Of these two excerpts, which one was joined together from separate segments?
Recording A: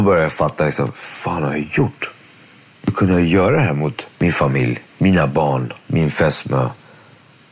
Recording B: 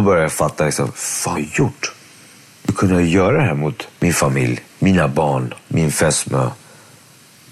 B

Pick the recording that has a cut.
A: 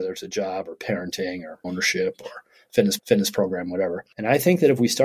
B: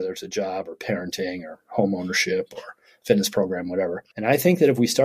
A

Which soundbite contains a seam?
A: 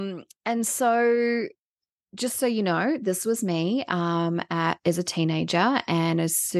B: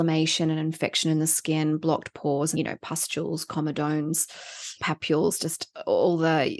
B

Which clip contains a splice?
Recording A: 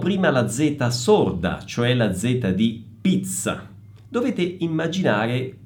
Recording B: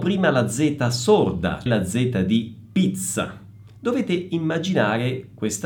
B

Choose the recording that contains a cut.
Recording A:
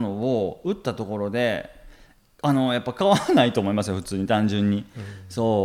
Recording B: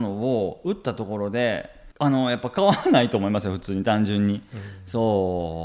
B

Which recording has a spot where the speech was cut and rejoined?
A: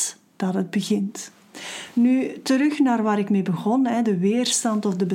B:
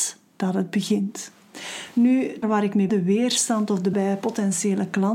B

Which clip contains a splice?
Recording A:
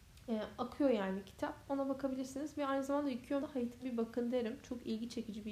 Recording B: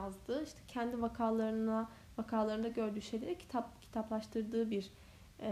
A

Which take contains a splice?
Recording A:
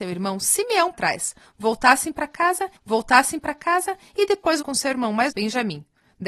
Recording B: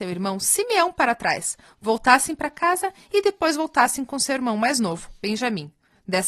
A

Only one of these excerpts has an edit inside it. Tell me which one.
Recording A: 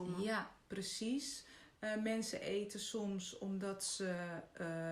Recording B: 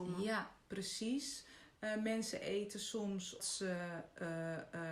B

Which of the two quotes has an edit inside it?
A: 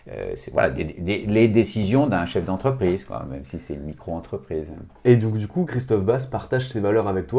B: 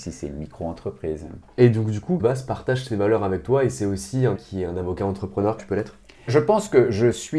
B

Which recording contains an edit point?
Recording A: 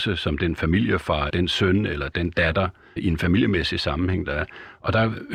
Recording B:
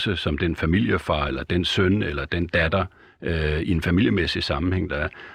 A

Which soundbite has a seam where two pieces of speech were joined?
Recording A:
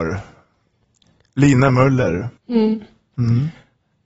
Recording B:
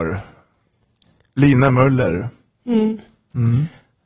A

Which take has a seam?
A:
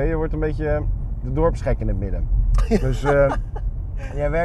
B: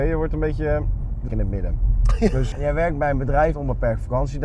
B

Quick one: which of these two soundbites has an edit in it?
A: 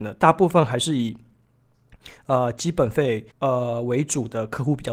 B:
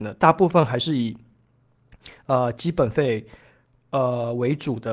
A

